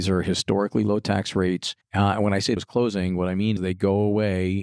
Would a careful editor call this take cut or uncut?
cut